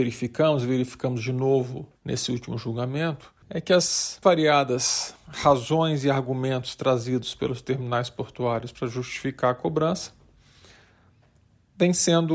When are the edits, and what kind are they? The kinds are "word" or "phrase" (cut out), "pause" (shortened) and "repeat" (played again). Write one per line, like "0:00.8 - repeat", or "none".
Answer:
0:02.0 - pause
0:03.4 - pause
0:04.2 - word